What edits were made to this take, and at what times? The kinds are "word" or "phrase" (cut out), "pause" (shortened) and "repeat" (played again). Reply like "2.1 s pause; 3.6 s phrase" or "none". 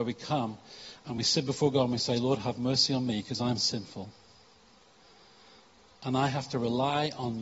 none